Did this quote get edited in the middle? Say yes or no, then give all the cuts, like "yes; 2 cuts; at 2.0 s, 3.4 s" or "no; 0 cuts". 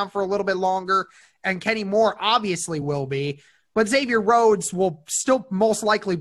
no; 0 cuts